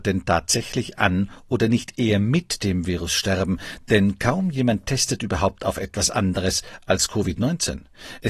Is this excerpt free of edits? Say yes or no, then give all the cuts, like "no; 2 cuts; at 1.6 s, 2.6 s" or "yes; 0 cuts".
yes; 0 cuts